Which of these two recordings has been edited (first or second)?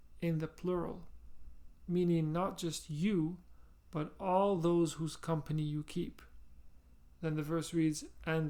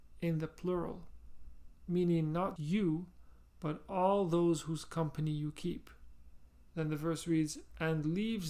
second